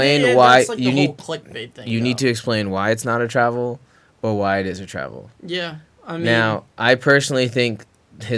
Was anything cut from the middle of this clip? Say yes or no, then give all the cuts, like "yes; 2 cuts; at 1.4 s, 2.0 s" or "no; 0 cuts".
no; 0 cuts